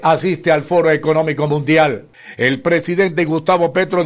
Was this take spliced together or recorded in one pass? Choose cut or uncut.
uncut